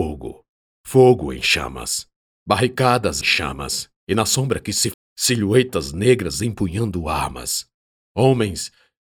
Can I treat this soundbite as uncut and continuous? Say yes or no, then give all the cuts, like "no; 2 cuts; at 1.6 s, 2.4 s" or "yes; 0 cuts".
no; 3 cuts; at 3.2 s, 4.0 s, 4.9 s